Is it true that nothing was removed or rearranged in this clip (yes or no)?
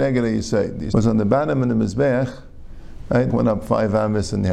no